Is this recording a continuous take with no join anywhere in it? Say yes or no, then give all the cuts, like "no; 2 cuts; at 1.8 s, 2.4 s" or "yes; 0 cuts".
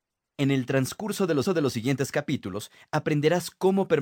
no; 1 cut; at 1.5 s